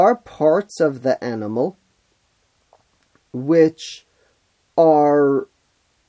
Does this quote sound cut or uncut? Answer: uncut